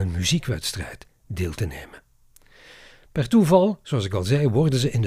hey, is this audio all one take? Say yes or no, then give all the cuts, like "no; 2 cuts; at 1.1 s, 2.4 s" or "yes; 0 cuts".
yes; 0 cuts